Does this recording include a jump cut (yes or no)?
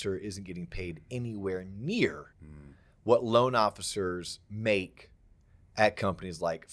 yes